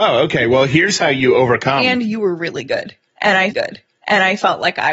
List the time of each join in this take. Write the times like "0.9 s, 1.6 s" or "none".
3.5 s